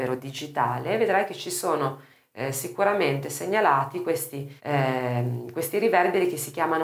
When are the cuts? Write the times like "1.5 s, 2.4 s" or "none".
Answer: 4.6 s